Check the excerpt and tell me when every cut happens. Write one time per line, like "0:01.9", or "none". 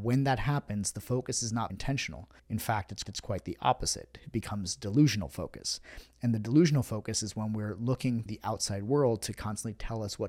0:01.7
0:02.4
0:03.0
0:08.3